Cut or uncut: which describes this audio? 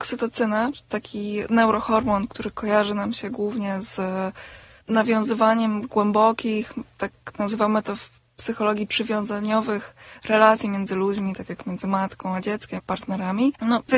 cut